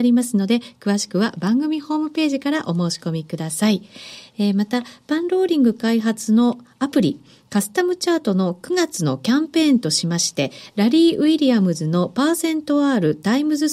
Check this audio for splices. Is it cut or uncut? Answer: uncut